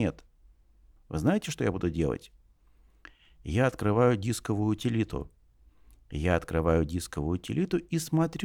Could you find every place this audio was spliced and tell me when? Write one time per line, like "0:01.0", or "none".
none